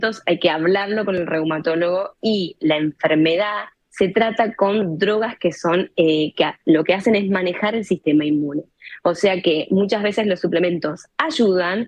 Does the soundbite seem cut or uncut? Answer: uncut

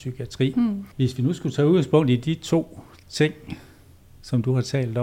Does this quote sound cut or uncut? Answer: uncut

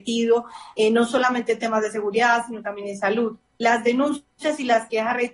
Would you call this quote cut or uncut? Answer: cut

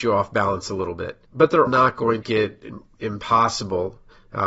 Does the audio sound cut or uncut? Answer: cut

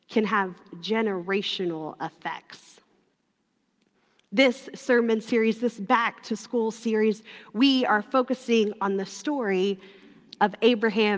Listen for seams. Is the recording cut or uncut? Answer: uncut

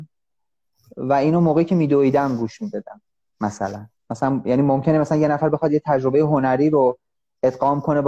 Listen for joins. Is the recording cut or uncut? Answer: uncut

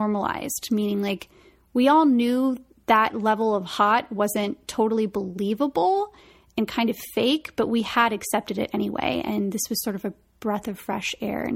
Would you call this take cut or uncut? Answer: uncut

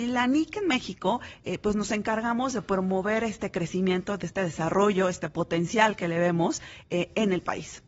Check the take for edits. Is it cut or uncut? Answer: uncut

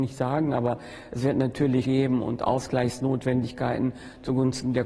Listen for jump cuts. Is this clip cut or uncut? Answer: cut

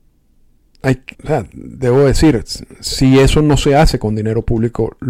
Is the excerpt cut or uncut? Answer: cut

